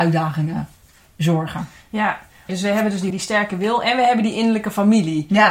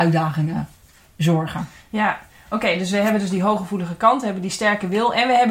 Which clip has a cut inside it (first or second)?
first